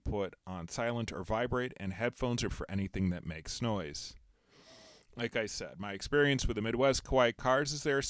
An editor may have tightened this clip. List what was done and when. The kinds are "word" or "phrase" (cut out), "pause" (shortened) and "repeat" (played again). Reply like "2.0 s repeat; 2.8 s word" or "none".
2.5 s word